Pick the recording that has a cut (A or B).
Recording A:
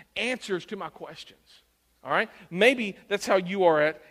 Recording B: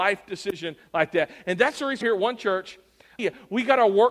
B